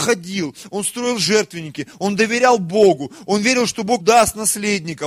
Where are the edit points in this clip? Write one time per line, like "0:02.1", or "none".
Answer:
0:04.0